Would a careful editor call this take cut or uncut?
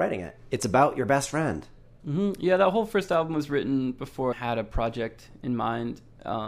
cut